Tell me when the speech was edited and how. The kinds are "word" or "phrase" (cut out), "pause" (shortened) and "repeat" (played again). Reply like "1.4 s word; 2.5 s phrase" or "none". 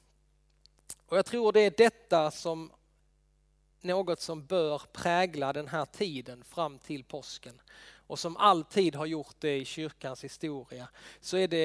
none

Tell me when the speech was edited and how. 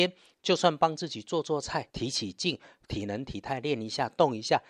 1.9 s pause

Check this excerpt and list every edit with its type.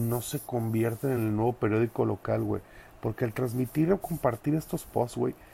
none

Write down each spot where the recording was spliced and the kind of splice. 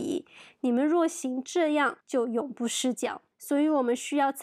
2.0 s pause; 3.3 s pause

